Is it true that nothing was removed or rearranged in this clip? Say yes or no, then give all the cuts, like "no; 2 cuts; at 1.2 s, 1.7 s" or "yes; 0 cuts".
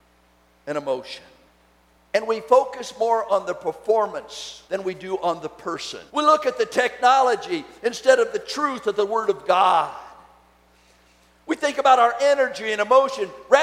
no; 3 cuts; at 1.5 s, 4.7 s, 6.1 s